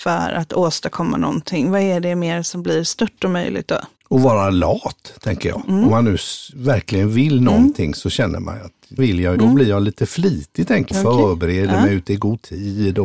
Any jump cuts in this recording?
yes; 4 cuts; at 4.0 s, 9.0 s, 9.4 s, 10.9 s

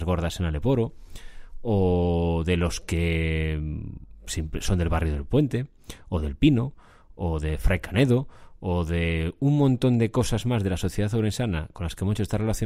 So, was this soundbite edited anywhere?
no; 0 cuts

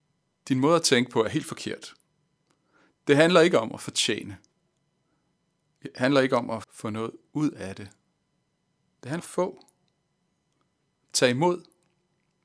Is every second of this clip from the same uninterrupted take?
no; 2 cuts; at 6.6 s, 9.2 s

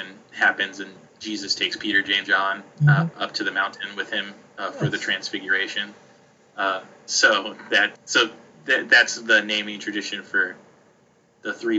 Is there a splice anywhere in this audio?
yes; 2 cuts; at 2.2 s, 7.9 s

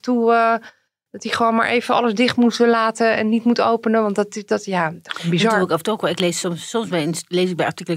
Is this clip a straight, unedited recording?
yes; 0 cuts

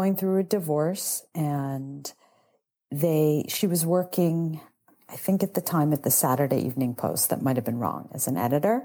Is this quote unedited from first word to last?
yes; 0 cuts

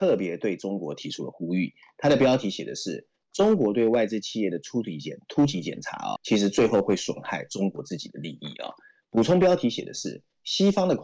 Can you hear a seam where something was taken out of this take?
yes; 1 cut; at 6.2 s

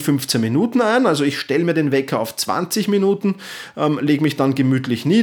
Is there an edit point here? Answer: no; 0 cuts

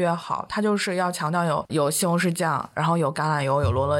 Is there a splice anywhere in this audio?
yes; 1 cut; at 1.7 s

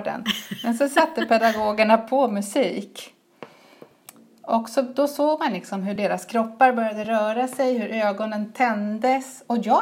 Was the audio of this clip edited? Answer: no; 0 cuts

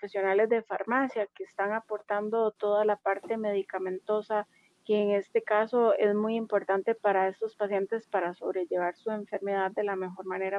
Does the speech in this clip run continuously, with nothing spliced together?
yes; 0 cuts

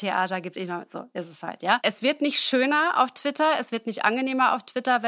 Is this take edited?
no; 0 cuts

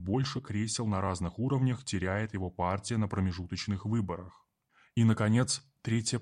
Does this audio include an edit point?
no; 0 cuts

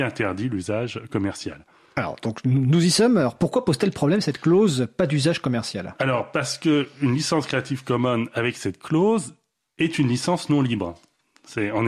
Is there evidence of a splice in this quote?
no; 0 cuts

